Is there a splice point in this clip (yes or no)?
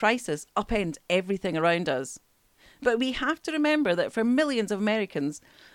no